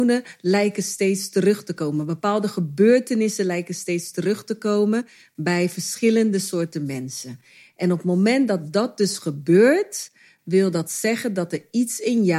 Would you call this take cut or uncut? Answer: uncut